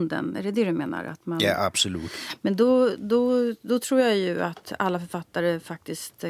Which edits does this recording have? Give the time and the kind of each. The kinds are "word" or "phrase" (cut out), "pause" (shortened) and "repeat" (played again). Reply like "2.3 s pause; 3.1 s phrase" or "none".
none